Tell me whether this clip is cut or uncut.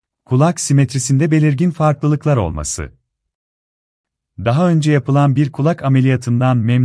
uncut